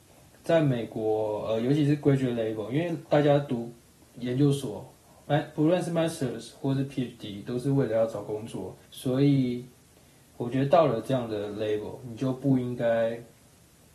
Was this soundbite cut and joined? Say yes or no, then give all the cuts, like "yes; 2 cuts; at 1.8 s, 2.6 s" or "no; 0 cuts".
yes; 1 cut; at 8.9 s